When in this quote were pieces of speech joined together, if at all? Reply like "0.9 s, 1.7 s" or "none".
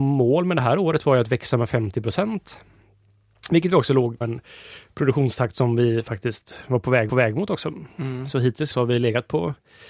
4.2 s, 7.1 s, 8.7 s